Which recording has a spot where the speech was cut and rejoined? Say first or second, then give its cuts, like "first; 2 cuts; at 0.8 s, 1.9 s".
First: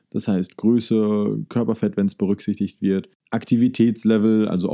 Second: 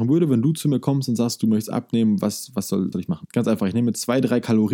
second; 1 cut; at 2.9 s